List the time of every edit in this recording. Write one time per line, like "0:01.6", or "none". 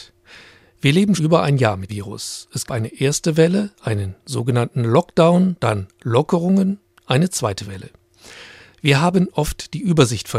0:01.2
0:01.9
0:02.7

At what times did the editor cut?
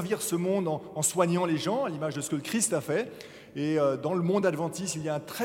none

